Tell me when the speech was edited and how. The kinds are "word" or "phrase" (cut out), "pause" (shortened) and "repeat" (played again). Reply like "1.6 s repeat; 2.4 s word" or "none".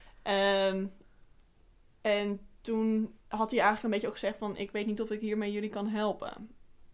3.2 s pause